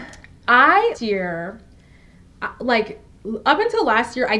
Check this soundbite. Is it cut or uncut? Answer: cut